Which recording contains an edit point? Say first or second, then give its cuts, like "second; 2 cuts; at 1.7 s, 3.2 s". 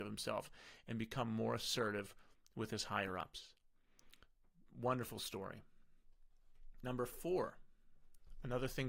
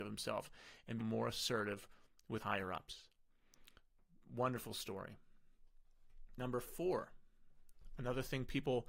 second; 2 cuts; at 1.0 s, 2.4 s